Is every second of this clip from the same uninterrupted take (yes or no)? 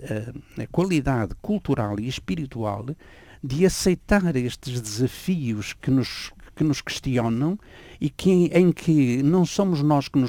yes